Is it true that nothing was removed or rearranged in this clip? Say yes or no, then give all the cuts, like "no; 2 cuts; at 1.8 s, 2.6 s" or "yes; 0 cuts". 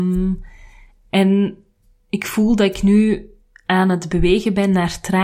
yes; 0 cuts